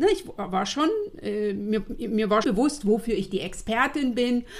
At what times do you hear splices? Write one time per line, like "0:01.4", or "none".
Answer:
0:02.4